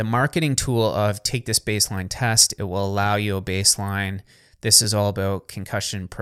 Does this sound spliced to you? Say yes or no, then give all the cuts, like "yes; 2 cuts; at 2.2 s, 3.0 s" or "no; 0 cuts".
no; 0 cuts